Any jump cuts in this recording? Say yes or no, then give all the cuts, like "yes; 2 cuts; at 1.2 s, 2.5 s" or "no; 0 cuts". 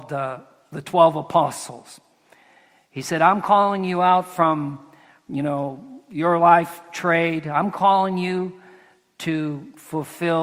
no; 0 cuts